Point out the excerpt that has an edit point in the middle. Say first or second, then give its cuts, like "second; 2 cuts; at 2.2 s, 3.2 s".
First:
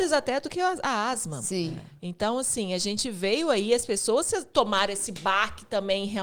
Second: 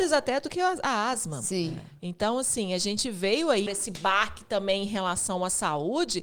second; 1 cut; at 3.7 s